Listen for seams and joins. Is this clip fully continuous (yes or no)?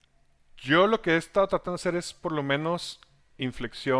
yes